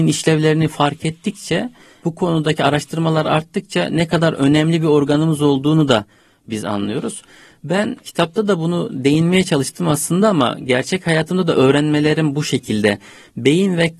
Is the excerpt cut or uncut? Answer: uncut